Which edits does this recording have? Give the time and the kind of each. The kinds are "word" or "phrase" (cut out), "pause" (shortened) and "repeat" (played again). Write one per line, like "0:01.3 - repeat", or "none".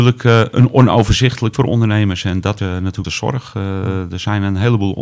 0:01.5 - word
0:02.6 - word
0:03.0 - word

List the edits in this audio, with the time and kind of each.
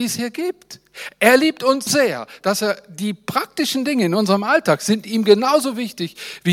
0:01.9 - word

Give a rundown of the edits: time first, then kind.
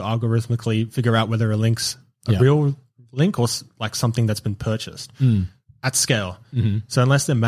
none

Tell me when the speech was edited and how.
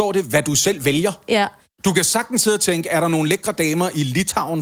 none

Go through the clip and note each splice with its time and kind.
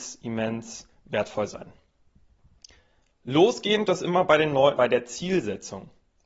0:03.9 - word
0:04.8 - word

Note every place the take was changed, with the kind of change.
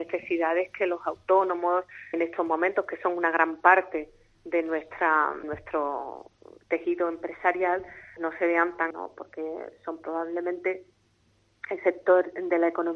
0:02.1 - word
0:05.4 - word
0:08.2 - word
0:08.9 - word

